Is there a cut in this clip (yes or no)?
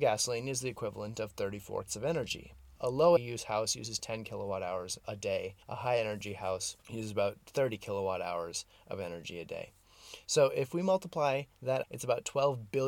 yes